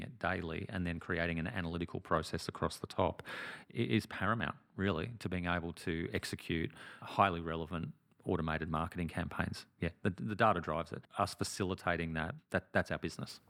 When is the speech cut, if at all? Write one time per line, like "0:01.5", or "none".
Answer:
none